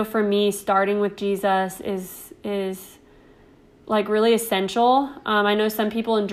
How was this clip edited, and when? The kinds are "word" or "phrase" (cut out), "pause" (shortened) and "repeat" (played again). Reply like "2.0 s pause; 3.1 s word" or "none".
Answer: none